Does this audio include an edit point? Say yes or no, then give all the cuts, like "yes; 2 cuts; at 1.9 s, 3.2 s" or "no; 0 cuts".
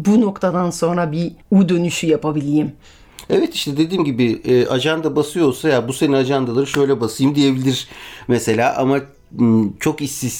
yes; 1 cut; at 1.4 s